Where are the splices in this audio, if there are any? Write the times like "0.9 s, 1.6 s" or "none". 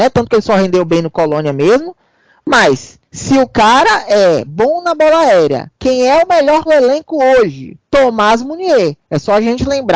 3.1 s, 5.7 s, 6.7 s, 7.8 s, 9.0 s